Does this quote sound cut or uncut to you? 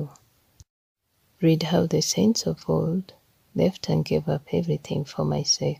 uncut